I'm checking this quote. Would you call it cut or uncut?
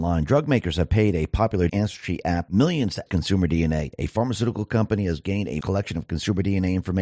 cut